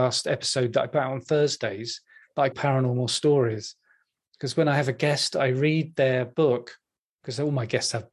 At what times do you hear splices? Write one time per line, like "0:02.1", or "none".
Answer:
0:02.5